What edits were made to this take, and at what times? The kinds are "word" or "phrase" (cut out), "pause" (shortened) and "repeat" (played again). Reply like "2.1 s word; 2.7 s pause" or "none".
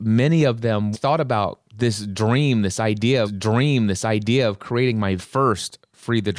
0.9 s phrase; 1.7 s pause; 3.2 s repeat; 5.2 s word